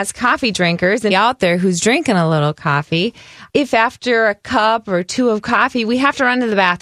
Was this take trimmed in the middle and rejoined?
yes; 2 cuts; at 1.1 s, 3.5 s

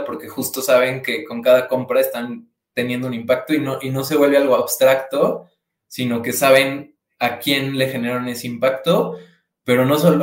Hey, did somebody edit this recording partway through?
no; 0 cuts

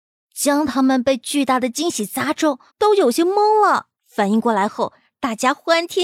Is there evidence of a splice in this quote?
yes; 2 cuts; at 2.7 s, 3.9 s

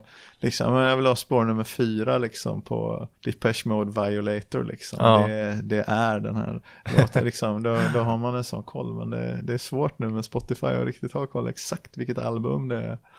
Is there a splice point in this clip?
yes; 1 cut; at 3.2 s

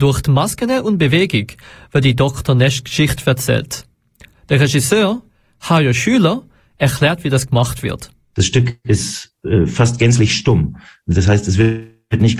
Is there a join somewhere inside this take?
no; 0 cuts

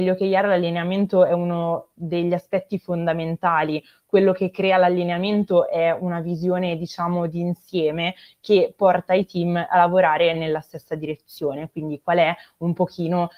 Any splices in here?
no; 0 cuts

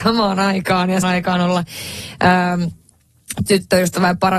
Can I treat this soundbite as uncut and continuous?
no; 2 cuts; at 1.0 s, 3.5 s

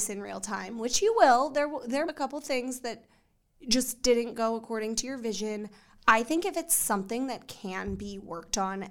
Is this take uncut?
no; 1 cut; at 2.0 s

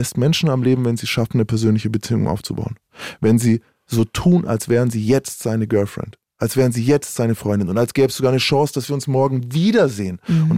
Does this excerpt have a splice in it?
no; 0 cuts

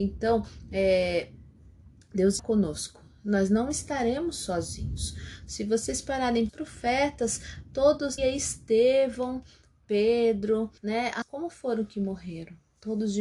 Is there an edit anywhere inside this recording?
yes; 5 cuts; at 2.4 s, 6.5 s, 8.2 s, 10.8 s, 11.2 s

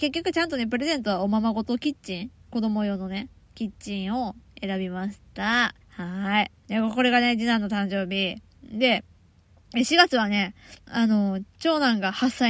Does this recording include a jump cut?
yes; 3 cuts; at 5.8 s, 6.6 s, 10.8 s

